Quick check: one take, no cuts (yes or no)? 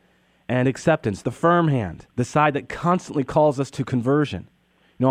no